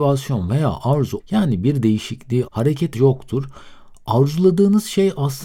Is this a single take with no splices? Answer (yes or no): no